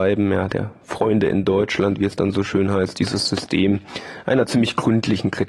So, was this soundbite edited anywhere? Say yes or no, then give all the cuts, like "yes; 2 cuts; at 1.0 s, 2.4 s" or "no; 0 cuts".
no; 0 cuts